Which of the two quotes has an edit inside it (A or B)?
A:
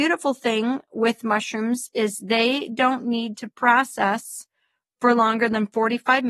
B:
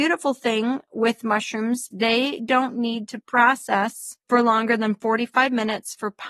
B